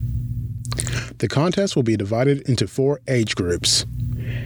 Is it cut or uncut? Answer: uncut